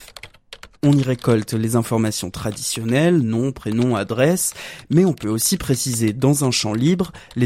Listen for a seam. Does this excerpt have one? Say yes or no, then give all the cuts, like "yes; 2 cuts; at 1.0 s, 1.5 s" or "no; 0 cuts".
no; 0 cuts